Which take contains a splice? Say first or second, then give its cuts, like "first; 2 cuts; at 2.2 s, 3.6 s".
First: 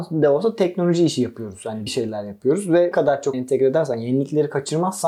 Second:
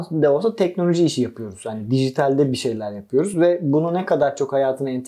first; 3 cuts; at 1.9 s, 2.9 s, 3.3 s